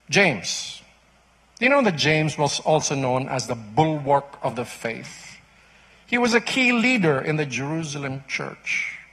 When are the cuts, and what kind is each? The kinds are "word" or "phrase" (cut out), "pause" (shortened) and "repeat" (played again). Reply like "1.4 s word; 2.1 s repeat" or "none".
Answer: none